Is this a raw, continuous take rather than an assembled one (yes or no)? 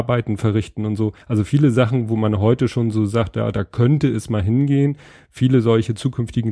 no